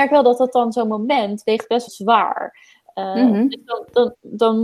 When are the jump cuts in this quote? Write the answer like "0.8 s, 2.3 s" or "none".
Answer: 1.9 s